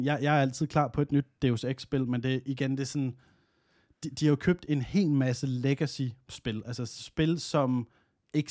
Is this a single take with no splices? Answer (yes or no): yes